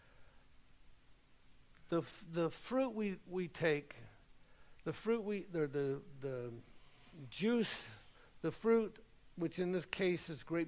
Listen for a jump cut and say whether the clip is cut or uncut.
uncut